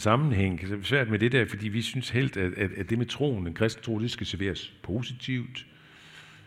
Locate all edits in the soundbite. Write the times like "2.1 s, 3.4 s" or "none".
none